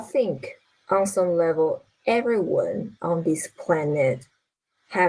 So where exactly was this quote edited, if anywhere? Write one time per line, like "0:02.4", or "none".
none